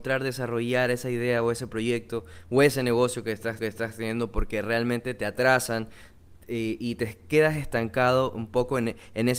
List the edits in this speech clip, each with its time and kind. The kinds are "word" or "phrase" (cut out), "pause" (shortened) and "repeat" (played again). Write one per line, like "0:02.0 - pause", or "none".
0:03.6 - repeat